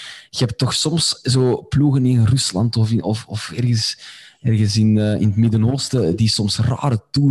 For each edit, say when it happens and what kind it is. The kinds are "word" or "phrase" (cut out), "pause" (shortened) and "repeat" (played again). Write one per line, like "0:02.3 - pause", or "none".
none